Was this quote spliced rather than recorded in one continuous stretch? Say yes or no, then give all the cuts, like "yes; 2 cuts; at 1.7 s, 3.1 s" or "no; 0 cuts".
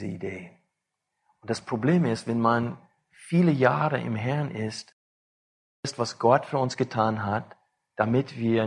no; 0 cuts